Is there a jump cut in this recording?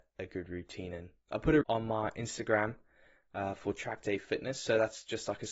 yes; 1 cut; at 1.6 s

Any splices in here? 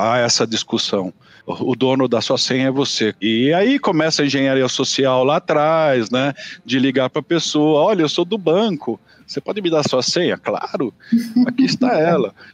no; 0 cuts

